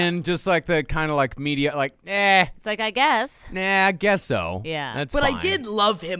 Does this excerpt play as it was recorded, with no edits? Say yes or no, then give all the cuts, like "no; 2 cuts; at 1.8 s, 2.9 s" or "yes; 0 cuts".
yes; 0 cuts